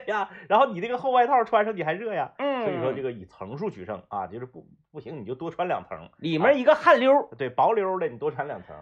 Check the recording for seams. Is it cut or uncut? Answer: uncut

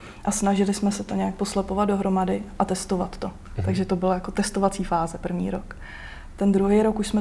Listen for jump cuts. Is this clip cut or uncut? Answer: uncut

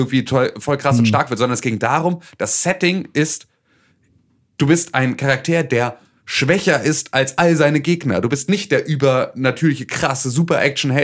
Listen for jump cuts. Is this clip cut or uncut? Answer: uncut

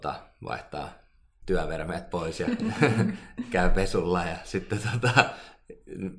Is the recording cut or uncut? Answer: uncut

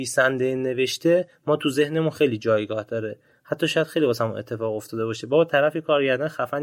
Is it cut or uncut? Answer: uncut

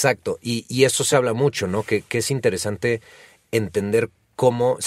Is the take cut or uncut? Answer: uncut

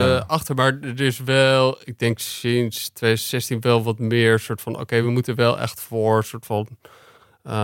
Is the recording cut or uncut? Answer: uncut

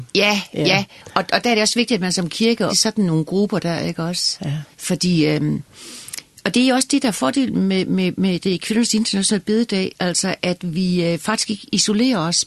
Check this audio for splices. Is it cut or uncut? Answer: cut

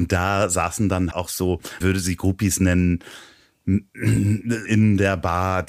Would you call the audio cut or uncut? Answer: cut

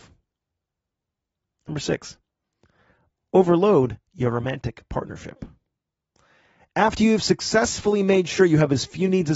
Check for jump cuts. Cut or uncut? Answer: uncut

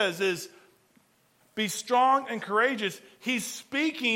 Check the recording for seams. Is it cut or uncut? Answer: cut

